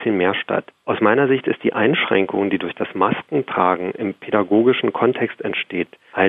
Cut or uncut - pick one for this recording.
uncut